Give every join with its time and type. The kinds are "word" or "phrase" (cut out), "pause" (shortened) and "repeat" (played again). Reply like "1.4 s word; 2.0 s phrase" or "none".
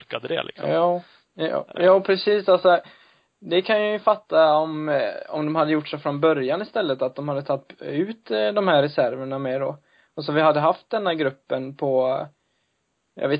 none